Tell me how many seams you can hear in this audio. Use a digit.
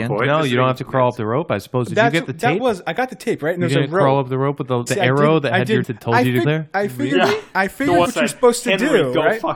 4